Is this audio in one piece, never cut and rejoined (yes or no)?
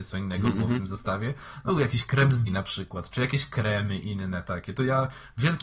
no